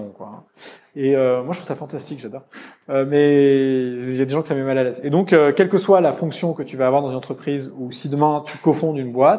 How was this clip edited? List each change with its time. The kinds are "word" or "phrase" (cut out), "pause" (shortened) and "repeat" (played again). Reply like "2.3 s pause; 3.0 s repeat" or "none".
none